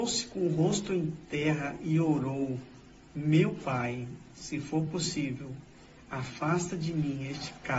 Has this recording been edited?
no; 0 cuts

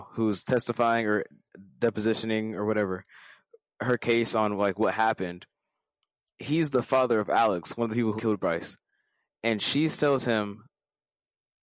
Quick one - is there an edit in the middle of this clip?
yes; 1 cut; at 8.2 s

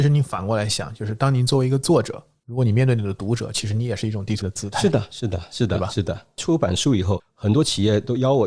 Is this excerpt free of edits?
no; 1 cut; at 4.4 s

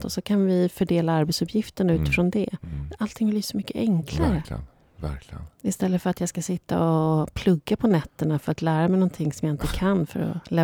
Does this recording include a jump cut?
no; 0 cuts

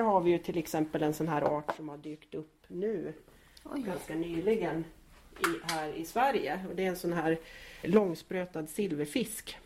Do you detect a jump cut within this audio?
yes; 1 cut; at 7.8 s

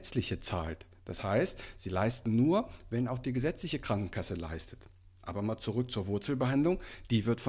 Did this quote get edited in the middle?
no; 0 cuts

